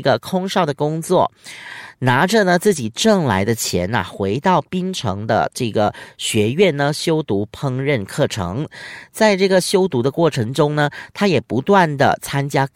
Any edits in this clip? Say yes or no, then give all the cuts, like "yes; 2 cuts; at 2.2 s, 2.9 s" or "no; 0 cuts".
no; 0 cuts